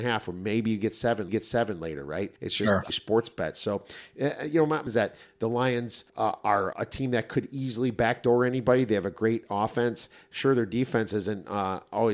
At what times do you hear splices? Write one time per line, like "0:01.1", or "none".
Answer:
0:01.3
0:02.4
0:02.9
0:04.9
0:06.1
0:06.7

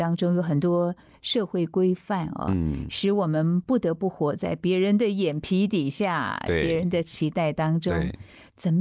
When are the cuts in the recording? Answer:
none

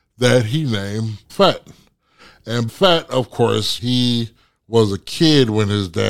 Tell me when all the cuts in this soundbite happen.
0:01.3
0:02.7
0:03.8

